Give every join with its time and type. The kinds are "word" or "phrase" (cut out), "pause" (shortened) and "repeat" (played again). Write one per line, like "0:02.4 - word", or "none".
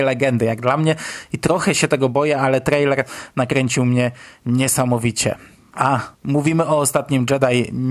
0:06.1 - pause